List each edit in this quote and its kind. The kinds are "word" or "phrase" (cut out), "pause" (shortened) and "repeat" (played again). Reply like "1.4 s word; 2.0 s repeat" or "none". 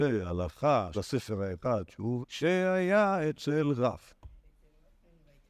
0.9 s word; 2.2 s word